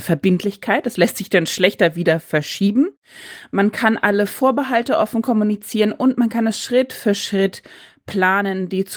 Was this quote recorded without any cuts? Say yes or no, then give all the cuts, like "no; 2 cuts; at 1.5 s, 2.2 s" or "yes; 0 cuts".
yes; 0 cuts